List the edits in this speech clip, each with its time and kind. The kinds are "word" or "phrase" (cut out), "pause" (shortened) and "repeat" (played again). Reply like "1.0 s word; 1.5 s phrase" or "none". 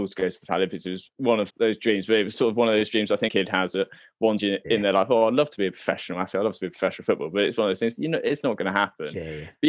1.5 s word; 2.3 s word; 3.3 s word; 4.4 s word